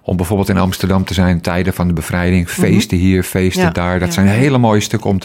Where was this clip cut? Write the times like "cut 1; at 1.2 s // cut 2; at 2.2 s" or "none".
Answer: cut 1; at 1.4 s